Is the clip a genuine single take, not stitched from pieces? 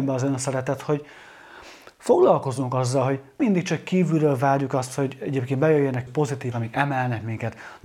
no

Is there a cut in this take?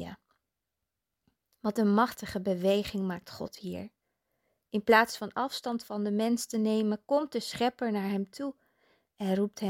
no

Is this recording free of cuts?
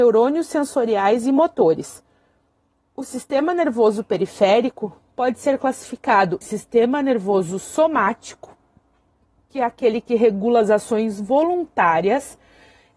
no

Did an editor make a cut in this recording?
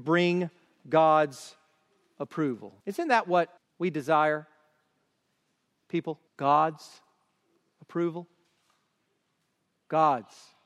yes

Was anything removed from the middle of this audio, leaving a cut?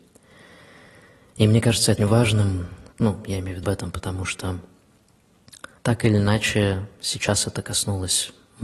yes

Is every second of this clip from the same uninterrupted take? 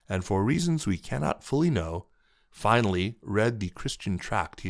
yes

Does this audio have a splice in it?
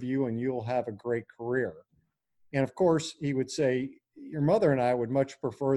no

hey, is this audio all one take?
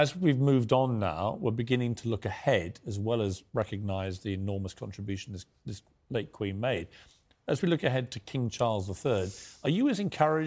yes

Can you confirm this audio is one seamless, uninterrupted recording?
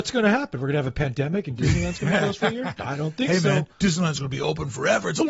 no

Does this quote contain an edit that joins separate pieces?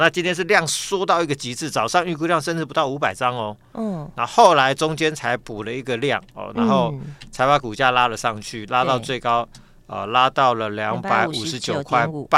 no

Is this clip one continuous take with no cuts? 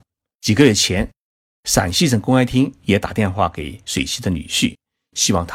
yes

